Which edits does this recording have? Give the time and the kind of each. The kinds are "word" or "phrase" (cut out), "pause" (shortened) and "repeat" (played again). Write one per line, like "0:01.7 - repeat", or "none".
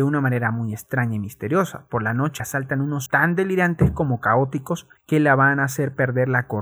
0:02.4 - word
0:03.1 - word
0:05.0 - pause